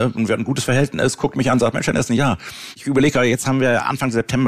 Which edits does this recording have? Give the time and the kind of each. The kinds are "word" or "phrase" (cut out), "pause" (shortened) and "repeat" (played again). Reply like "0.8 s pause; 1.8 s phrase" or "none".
none

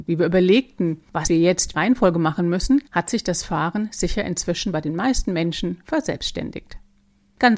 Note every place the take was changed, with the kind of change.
1.7 s phrase; 2.9 s pause

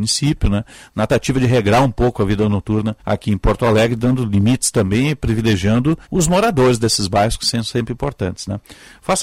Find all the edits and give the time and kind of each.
1.1 s word; 3.0 s pause; 6.0 s pause

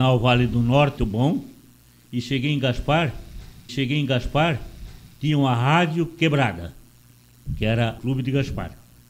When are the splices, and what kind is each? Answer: 1.0 s word; 3.7 s repeat; 8.0 s word

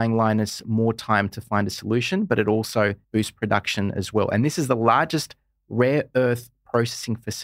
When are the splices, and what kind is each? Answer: 3.0 s pause

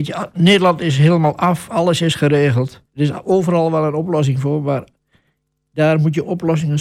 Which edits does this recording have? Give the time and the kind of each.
2.9 s pause

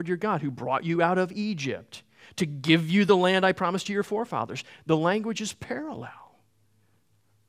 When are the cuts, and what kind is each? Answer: none

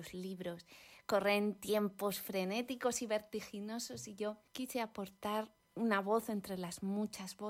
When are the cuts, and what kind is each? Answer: 4.5 s pause

